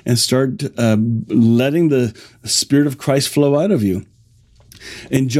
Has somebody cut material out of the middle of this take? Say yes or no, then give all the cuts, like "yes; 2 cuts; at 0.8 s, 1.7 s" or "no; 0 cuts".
no; 0 cuts